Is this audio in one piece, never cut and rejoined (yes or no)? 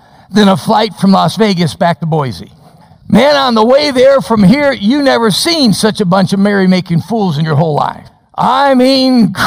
no